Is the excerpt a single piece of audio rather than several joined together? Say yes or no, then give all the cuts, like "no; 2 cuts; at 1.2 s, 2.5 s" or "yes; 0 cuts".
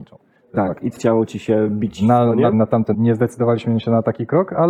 no; 3 cuts; at 1.0 s, 2.5 s, 2.9 s